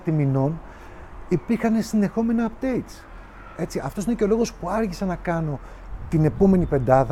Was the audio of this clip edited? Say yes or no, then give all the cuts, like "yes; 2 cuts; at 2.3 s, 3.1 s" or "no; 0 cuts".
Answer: no; 0 cuts